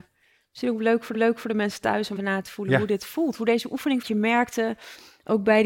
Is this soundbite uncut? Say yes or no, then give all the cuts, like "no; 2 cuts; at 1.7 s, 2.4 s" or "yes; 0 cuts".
no; 3 cuts; at 1.1 s, 2.2 s, 4.0 s